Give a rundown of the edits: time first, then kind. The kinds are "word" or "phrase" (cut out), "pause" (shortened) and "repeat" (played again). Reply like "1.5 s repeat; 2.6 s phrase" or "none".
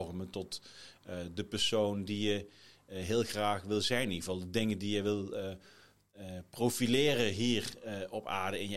none